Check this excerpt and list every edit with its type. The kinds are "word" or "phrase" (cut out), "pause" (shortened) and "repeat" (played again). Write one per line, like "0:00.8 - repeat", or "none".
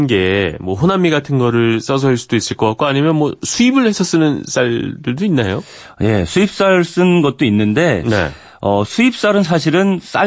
none